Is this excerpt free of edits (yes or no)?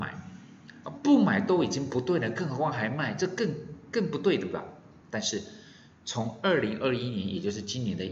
no